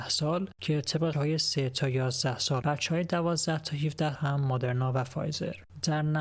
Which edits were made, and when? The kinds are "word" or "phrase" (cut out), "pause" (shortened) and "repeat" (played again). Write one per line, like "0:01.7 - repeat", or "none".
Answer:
0:01.1 - phrase
0:02.6 - phrase
0:04.2 - word